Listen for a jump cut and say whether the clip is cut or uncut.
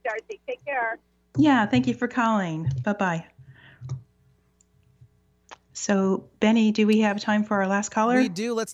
uncut